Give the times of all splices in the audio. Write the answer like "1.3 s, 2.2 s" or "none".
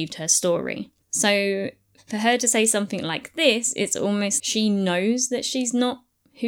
1.0 s, 4.4 s